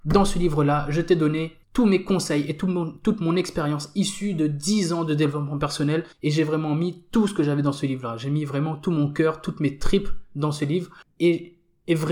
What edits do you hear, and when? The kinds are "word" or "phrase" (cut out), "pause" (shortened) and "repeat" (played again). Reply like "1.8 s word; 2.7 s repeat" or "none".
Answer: 1.6 s pause; 6.1 s pause; 11.0 s pause